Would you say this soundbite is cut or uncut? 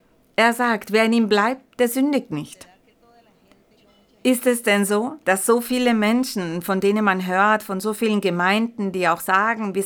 cut